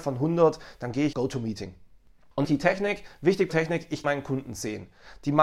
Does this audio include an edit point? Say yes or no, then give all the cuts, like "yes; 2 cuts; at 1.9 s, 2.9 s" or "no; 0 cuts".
yes; 4 cuts; at 1.1 s, 2.4 s, 3.5 s, 4.0 s